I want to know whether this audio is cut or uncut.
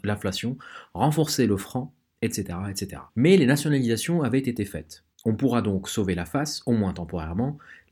cut